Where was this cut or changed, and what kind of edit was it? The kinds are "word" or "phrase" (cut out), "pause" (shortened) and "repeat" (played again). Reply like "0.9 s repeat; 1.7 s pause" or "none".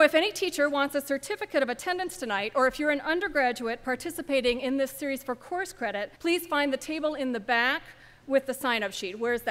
6.2 s pause

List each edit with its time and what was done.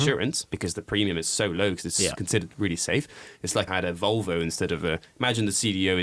3.7 s phrase

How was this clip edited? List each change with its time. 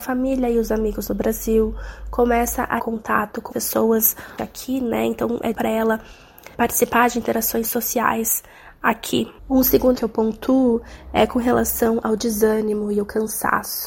2.8 s word; 3.5 s word; 4.4 s word; 5.5 s word; 6.5 s word; 7.6 s word; 9.4 s pause; 9.9 s word

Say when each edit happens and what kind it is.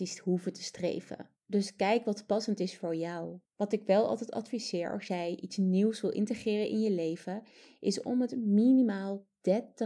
1.4 s pause; 3.5 s pause

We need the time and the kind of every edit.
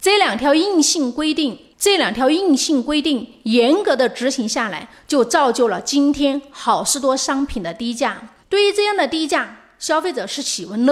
8.4 s pause

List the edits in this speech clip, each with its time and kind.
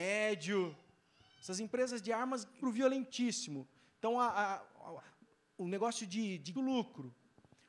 2.6 s phrase; 5.0 s word; 6.5 s phrase

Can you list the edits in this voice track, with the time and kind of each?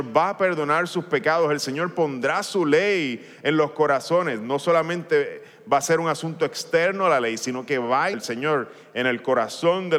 8.1 s word

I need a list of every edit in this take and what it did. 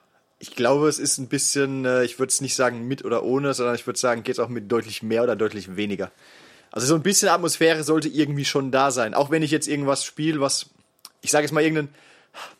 none

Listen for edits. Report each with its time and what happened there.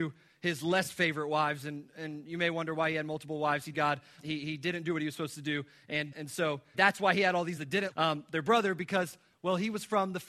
3.7 s word; 4.2 s word; 6.1 s word; 6.7 s word; 7.6 s phrase; 7.9 s word

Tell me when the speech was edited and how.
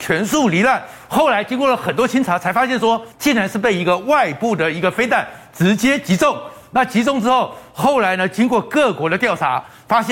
3.1 s pause

